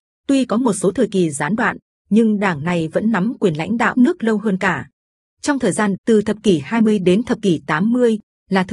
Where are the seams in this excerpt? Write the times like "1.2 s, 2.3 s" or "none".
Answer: 3.9 s, 5.9 s